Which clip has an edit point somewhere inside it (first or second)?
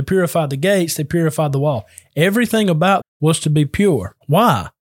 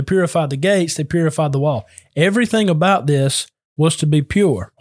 first